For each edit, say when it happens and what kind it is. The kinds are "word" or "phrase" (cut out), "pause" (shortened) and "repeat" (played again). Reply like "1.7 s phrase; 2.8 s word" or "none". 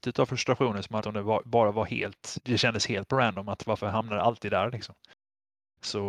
1.0 s word